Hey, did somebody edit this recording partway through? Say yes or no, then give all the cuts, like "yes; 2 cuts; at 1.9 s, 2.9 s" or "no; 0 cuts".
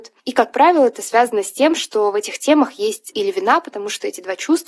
yes; 1 cut; at 3.1 s